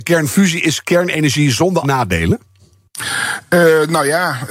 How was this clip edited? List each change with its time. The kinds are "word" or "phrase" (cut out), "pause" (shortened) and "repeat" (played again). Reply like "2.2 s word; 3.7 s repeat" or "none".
1.8 s word